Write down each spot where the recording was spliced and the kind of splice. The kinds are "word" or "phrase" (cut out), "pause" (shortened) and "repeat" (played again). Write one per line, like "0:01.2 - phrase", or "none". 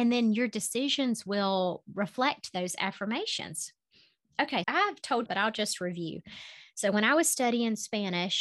0:04.6 - word
0:05.3 - phrase